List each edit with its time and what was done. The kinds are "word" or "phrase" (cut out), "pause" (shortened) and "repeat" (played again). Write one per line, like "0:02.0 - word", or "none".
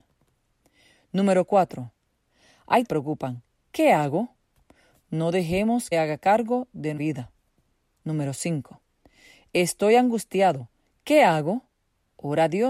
0:02.9 - phrase
0:05.9 - phrase
0:07.0 - word